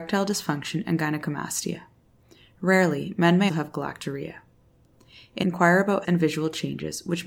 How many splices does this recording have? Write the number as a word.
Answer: three